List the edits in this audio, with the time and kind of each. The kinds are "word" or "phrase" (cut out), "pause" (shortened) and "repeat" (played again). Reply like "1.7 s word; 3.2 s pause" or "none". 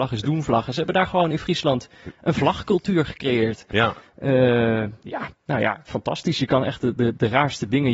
5.3 s pause